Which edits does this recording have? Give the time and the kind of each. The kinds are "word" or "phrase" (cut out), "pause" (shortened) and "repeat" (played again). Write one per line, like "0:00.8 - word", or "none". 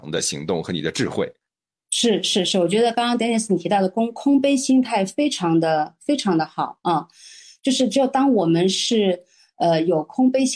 none